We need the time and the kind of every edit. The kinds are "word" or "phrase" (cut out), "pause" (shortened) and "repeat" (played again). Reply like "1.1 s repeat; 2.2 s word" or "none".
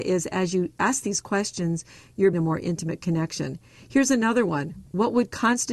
2.3 s word